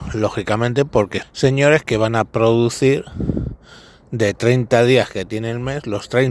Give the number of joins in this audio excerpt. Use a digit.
1